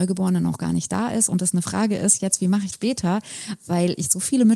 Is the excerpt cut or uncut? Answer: cut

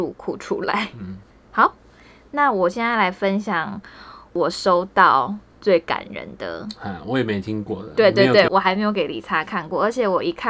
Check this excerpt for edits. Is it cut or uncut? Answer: cut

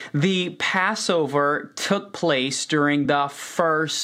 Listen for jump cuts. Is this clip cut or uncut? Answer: uncut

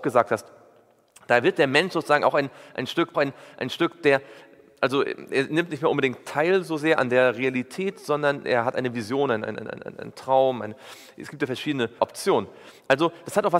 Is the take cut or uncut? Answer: cut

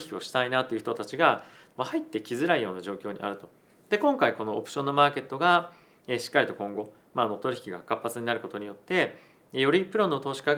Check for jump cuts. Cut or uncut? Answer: uncut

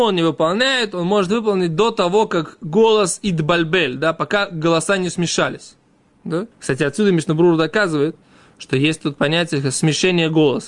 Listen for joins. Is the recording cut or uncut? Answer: cut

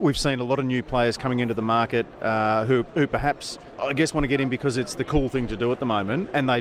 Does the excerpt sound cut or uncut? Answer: uncut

